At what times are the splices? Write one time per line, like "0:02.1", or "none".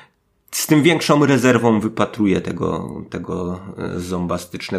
none